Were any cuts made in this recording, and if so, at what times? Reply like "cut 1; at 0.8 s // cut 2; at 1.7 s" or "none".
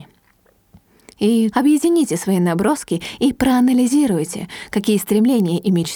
cut 1; at 1.5 s